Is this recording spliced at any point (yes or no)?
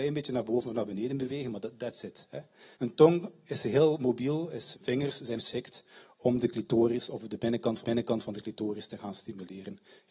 yes